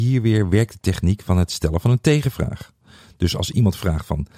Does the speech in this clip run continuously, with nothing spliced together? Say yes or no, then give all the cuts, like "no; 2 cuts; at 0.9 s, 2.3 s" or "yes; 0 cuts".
yes; 0 cuts